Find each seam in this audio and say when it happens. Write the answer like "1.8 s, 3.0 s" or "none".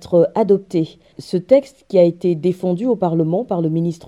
none